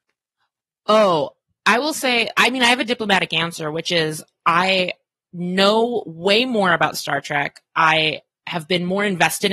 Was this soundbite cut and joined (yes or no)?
no